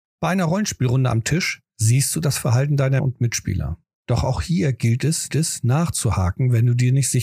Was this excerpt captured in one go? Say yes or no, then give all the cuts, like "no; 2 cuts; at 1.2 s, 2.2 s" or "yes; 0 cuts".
no; 4 cuts; at 1.7 s, 3.0 s, 3.8 s, 5.3 s